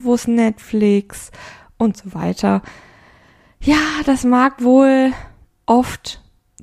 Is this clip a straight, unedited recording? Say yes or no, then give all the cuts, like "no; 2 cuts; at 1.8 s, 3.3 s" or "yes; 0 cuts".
yes; 0 cuts